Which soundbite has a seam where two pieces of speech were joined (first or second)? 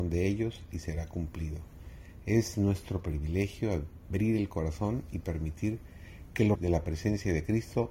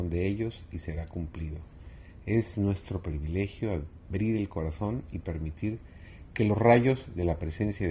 first